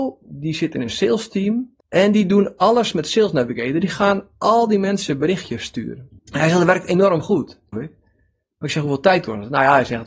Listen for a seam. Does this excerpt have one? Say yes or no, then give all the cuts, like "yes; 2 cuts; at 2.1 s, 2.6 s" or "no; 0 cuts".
yes; 3 cuts; at 1.8 s, 6.2 s, 7.7 s